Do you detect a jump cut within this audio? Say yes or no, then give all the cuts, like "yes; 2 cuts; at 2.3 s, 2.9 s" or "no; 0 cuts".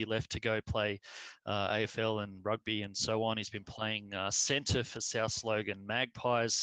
no; 0 cuts